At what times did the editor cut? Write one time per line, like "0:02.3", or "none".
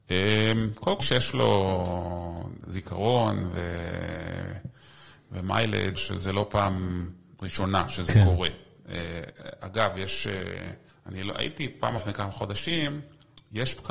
0:01.0
0:06.0
0:10.9
0:12.0